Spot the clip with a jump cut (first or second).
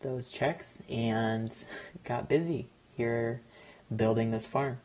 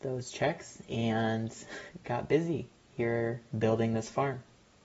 second